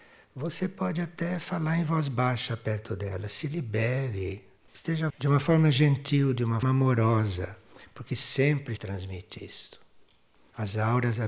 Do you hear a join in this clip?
yes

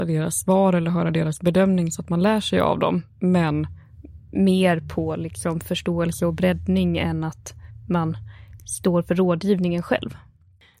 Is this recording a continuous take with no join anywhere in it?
yes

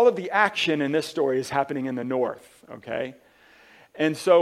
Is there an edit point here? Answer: no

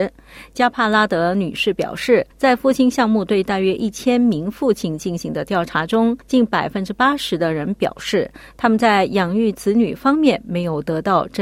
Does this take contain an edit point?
yes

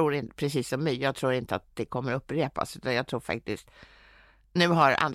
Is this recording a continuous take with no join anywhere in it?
yes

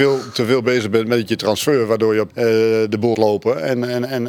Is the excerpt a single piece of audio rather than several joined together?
no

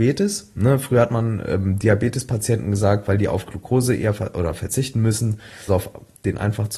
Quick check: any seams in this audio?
yes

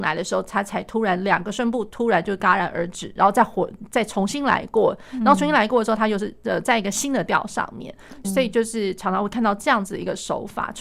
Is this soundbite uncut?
no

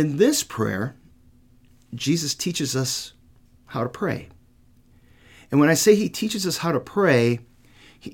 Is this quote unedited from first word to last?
yes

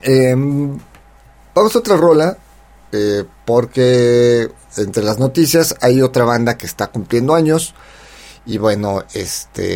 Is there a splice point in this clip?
no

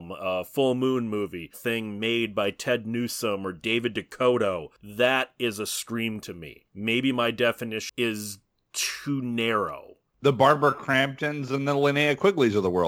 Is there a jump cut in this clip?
yes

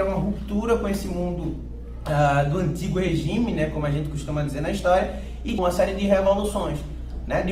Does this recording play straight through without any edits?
no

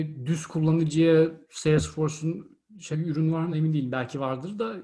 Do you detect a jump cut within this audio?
yes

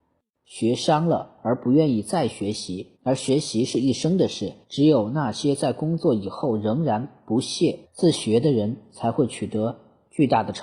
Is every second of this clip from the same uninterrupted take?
no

